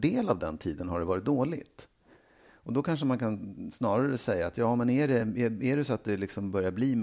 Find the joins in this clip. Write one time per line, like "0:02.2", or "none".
none